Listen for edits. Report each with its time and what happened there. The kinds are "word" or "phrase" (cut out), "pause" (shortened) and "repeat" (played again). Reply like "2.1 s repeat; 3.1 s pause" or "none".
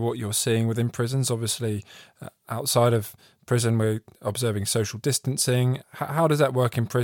5.8 s word